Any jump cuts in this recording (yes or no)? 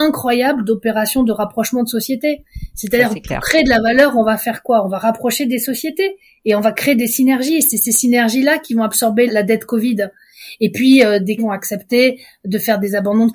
yes